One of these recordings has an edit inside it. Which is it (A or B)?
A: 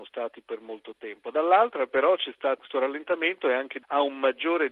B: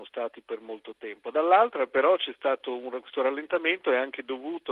A